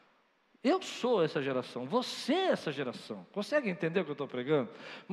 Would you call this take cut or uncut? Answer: uncut